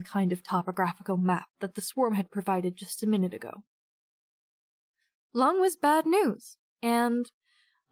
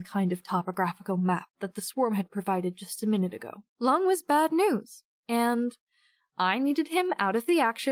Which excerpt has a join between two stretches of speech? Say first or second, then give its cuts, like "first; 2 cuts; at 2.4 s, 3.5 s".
second; 1 cut; at 3.7 s